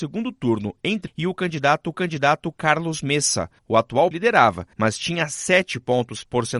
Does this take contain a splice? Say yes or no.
yes